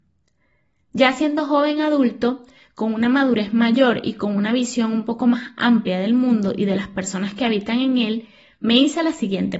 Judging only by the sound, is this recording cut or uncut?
uncut